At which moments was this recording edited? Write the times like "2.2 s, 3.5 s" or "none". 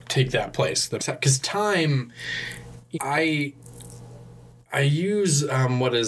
1.0 s, 2.9 s

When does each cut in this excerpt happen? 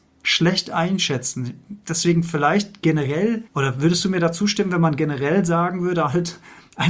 3.5 s

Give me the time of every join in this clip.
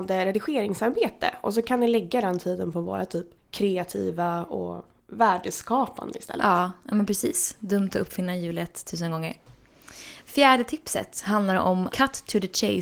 3.4 s, 11.9 s

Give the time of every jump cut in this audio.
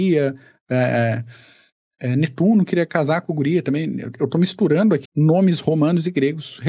5.1 s

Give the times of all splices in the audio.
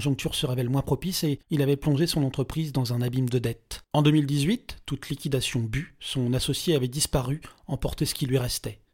1.4 s, 3.9 s

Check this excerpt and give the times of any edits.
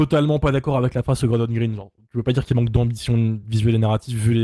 none

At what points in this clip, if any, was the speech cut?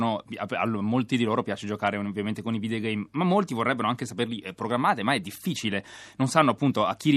none

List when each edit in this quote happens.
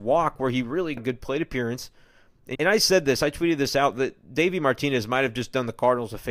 1.0 s, 2.6 s

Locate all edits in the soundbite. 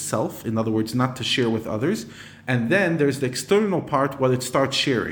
none

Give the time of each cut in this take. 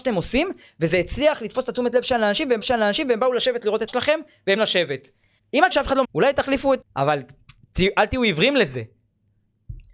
2.6 s, 3.9 s, 4.6 s, 5.4 s, 5.7 s, 6.0 s, 6.8 s

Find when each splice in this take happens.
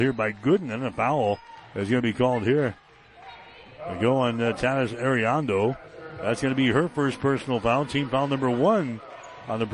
1.6 s

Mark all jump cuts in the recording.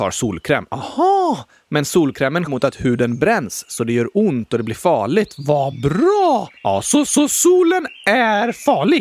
2.5 s, 6.6 s, 7.1 s

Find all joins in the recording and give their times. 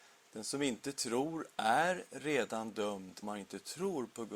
3.2 s

